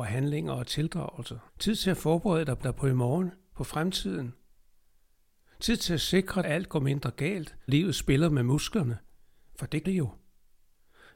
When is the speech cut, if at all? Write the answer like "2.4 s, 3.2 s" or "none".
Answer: 1.5 s, 2.6 s, 6.4 s, 7.7 s, 9.8 s